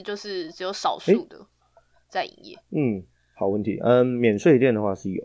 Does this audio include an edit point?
no; 0 cuts

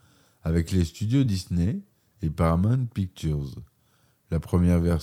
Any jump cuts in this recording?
no; 0 cuts

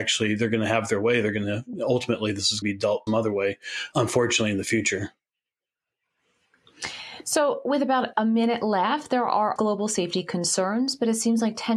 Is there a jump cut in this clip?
yes; 4 cuts; at 2.6 s, 3.1 s, 3.9 s, 9.6 s

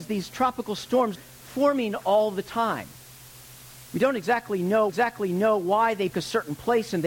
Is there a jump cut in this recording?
yes; 3 cuts; at 1.1 s, 4.9 s, 6.1 s

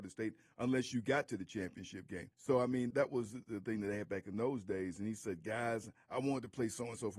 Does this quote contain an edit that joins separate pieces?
yes; 2 cuts; at 2.3 s, 2.9 s

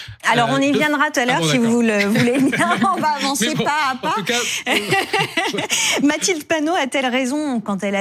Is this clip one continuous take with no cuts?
no; 1 cut; at 1.1 s

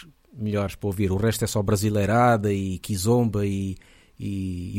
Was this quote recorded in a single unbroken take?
yes; 0 cuts

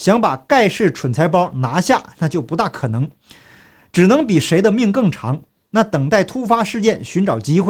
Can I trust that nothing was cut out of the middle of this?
yes; 0 cuts

